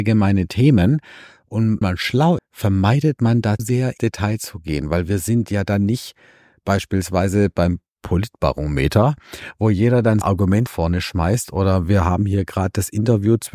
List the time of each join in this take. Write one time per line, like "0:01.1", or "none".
0:01.8
0:02.4
0:03.6
0:04.0
0:10.2
0:10.7